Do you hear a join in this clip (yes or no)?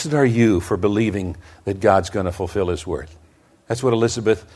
no